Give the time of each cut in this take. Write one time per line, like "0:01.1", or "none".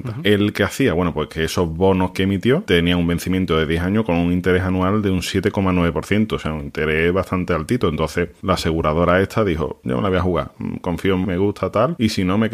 0:02.1
0:11.2

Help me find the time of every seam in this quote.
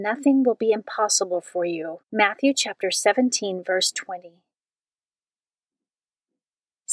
0:02.0

